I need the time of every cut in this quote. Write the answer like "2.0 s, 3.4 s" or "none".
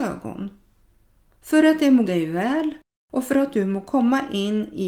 2.0 s